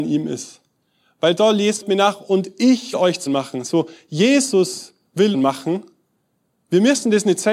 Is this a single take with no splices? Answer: no; 4 cuts; at 1.8 s, 2.9 s, 3.3 s, 5.3 s

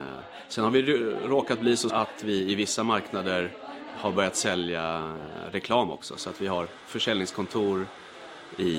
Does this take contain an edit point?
yes; 1 cut; at 1.9 s

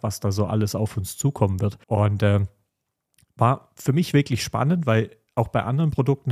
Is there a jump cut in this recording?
yes; 1 cut; at 1.8 s

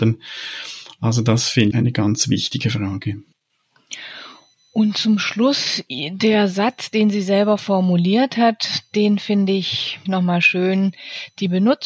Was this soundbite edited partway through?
yes; 2 cuts; at 1.7 s, 10.1 s

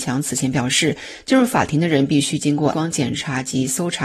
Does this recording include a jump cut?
yes; 1 cut; at 2.7 s

